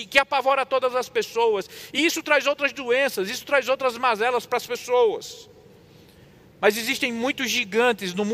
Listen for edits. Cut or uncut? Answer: uncut